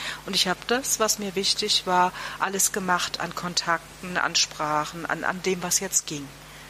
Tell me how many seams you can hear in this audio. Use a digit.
0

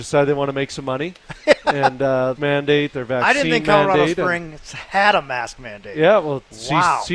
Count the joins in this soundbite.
1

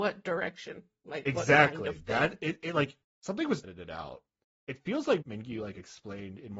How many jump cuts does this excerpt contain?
2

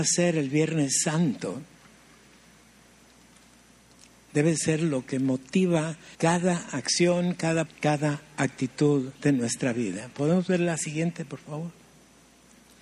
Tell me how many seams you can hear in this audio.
3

